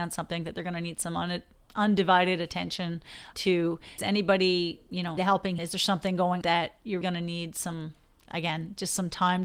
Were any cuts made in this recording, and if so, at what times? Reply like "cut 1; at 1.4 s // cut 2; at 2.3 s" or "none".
cut 1; at 3.3 s // cut 2; at 4.0 s // cut 3; at 5.2 s // cut 4; at 5.6 s // cut 5; at 6.4 s // cut 6; at 7.0 s